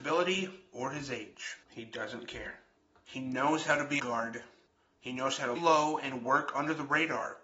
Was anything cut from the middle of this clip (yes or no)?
yes